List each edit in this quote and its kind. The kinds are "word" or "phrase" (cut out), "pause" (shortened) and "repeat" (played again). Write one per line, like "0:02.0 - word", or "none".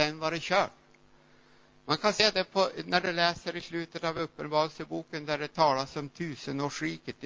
none